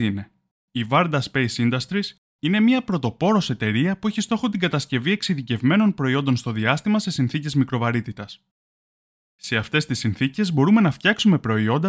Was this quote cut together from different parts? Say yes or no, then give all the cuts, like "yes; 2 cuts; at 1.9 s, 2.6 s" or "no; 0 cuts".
no; 0 cuts